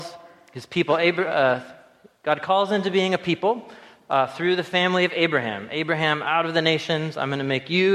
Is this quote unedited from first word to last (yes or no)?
yes